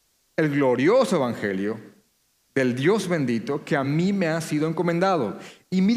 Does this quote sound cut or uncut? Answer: uncut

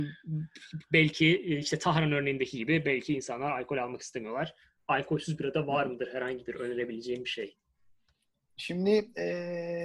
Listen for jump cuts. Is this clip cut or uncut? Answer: uncut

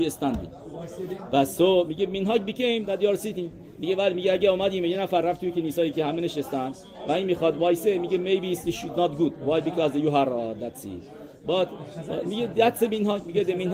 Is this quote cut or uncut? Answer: uncut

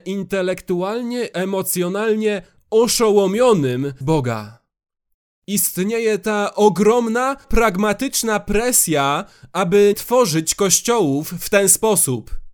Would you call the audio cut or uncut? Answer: cut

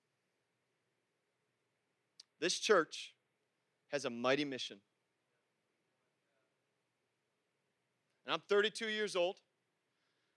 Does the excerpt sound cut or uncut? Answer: uncut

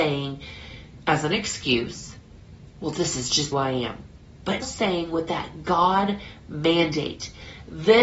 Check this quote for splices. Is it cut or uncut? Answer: cut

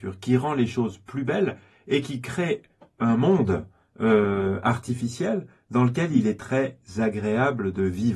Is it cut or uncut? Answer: uncut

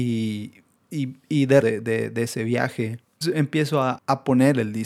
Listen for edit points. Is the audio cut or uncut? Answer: cut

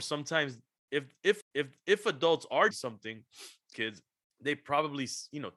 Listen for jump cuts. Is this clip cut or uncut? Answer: cut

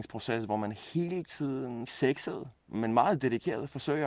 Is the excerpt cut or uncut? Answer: cut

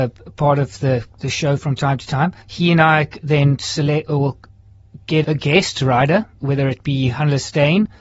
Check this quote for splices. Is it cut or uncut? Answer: cut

